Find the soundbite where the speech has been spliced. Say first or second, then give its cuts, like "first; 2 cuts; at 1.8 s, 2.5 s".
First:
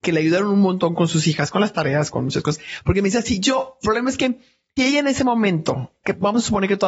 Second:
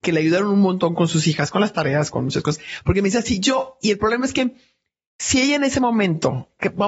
first; 2 cuts; at 3.8 s, 4.8 s